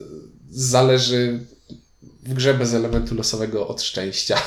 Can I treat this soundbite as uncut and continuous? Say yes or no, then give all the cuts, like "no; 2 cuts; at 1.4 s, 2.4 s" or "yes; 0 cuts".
yes; 0 cuts